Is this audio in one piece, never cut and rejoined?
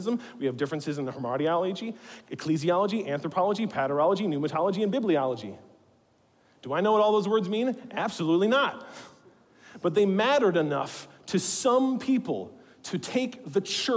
yes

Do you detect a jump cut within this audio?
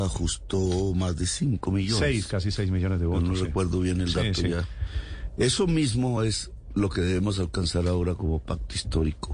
no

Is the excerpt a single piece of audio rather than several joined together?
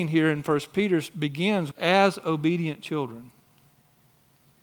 no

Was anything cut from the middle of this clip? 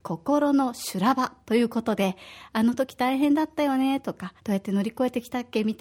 yes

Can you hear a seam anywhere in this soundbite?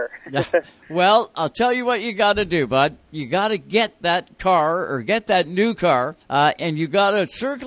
yes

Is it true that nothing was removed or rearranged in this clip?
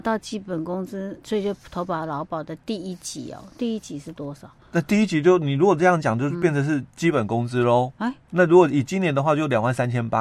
no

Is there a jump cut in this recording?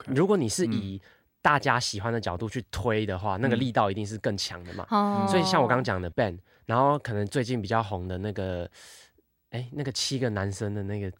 yes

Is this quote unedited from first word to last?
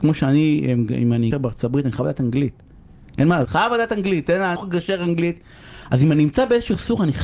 no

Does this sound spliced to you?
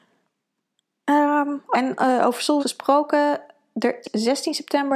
yes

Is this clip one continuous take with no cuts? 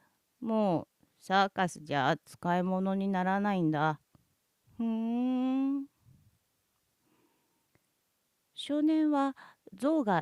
no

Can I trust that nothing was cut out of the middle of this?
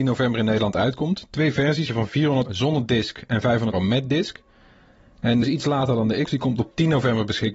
no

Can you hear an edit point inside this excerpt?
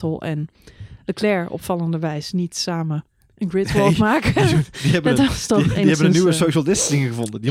no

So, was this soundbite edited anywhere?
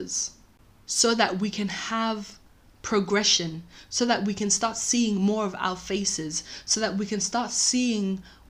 no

